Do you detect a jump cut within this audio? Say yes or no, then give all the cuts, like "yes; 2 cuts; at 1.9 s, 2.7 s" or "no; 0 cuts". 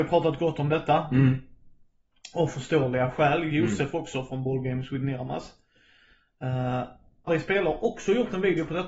yes; 1 cut; at 7.3 s